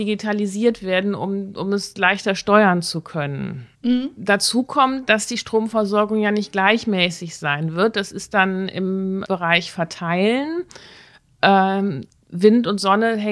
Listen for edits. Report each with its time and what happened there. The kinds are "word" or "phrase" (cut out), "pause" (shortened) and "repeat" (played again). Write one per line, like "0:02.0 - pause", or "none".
0:03.7 - pause
0:12.1 - pause